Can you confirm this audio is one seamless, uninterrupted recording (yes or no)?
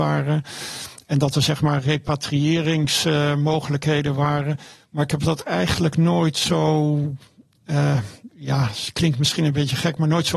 yes